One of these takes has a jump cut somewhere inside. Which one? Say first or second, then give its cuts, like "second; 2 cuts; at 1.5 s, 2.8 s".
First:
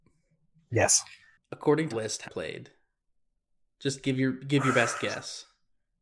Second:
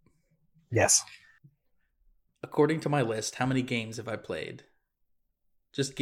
first; 3 cuts; at 1.3 s, 1.9 s, 2.2 s